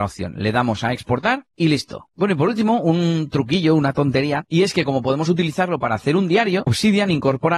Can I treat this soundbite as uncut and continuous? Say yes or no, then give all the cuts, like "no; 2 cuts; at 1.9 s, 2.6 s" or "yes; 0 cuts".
no; 1 cut; at 1.5 s